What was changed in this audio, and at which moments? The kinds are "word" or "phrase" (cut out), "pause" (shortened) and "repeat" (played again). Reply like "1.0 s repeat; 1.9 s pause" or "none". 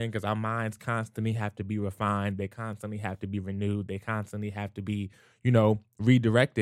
none